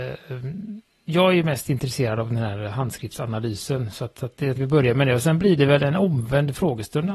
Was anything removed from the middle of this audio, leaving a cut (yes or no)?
yes